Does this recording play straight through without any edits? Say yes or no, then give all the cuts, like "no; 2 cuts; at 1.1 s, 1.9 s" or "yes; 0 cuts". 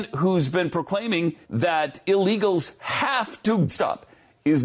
no; 2 cuts; at 1.4 s, 3.7 s